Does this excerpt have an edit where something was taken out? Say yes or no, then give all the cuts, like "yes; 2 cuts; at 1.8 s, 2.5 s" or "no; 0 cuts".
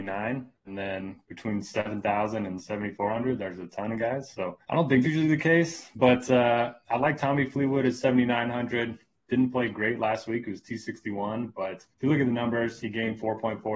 yes; 3 cuts; at 4.6 s, 5.0 s, 11.9 s